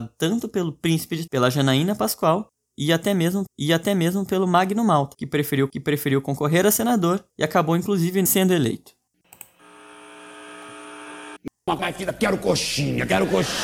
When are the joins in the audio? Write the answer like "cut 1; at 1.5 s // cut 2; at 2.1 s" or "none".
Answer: cut 1; at 1.3 s // cut 2; at 3.5 s // cut 3; at 5.7 s // cut 4; at 7.3 s // cut 5; at 8.3 s // cut 6; at 11.8 s